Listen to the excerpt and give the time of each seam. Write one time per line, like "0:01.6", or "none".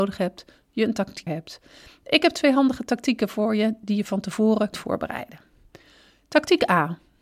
0:01.3
0:04.7